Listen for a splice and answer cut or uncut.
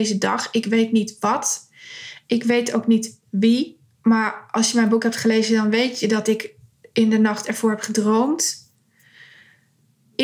uncut